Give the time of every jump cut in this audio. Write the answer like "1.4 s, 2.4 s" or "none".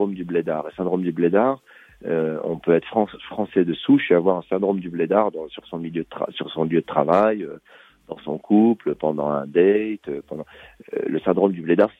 none